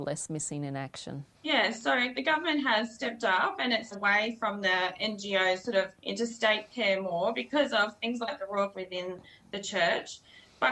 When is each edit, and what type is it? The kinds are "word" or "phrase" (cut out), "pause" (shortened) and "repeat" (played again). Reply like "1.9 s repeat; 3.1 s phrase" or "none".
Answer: 1.3 s pause; 3.9 s phrase; 6.0 s pause; 8.7 s phrase